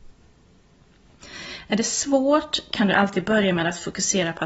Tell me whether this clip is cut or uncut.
uncut